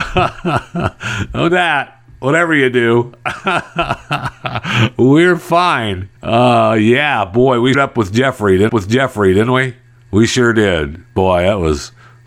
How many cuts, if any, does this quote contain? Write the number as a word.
four